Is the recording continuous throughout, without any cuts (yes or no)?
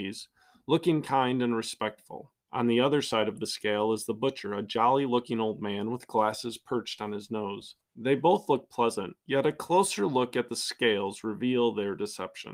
no